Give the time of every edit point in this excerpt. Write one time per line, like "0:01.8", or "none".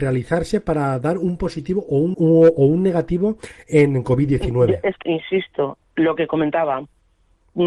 0:02.1
0:05.0